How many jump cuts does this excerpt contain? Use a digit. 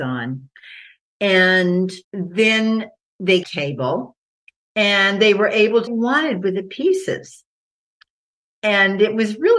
3